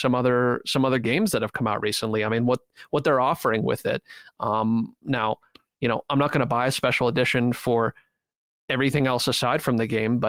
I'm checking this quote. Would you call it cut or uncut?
uncut